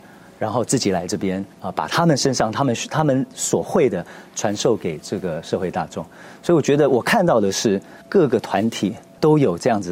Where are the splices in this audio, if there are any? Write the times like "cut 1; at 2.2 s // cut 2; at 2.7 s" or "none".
cut 1; at 1.5 s // cut 2; at 8.0 s